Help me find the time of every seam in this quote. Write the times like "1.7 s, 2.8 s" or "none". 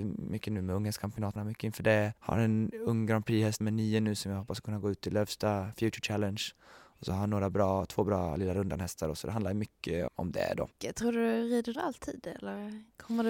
1.4 s, 2.2 s, 3.6 s, 10.1 s, 10.7 s, 11.7 s